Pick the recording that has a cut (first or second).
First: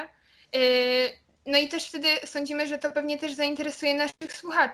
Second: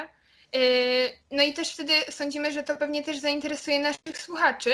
second